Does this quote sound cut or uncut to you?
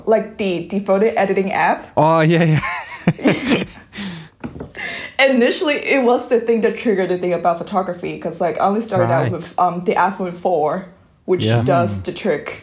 uncut